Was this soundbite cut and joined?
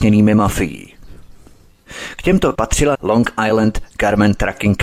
yes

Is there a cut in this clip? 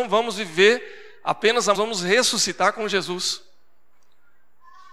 yes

